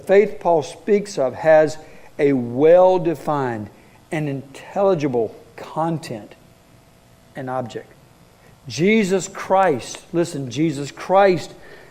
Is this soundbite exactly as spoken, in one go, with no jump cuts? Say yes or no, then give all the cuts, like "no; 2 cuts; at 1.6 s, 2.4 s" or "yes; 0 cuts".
yes; 0 cuts